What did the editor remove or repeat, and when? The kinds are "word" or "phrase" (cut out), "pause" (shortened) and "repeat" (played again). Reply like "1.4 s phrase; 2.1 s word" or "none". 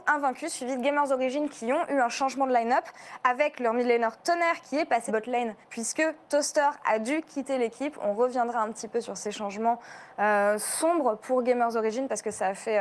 4.2 s word; 5.1 s phrase; 5.6 s pause